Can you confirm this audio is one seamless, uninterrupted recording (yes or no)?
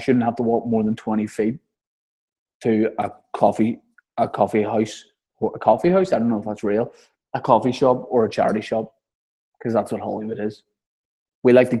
yes